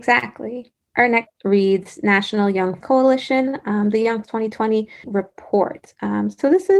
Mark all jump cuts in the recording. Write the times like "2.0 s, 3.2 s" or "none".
1.3 s, 2.8 s, 4.2 s, 5.0 s